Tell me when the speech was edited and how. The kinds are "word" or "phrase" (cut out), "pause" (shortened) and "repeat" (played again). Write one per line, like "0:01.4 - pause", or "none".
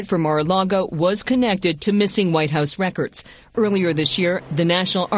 none